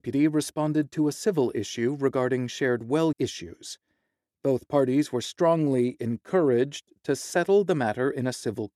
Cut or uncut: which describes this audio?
cut